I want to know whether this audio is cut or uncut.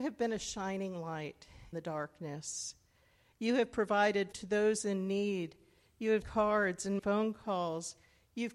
cut